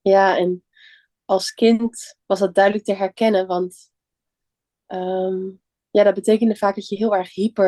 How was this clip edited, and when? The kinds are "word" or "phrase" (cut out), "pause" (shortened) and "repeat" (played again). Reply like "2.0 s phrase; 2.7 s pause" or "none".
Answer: 2.2 s pause